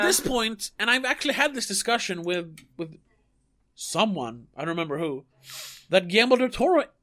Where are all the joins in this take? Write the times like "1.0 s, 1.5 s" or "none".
none